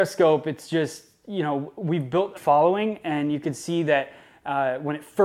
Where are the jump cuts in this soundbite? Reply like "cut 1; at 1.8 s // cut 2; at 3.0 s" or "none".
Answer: cut 1; at 2.4 s